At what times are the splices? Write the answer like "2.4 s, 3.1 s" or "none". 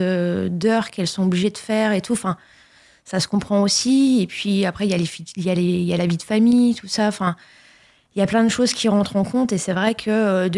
none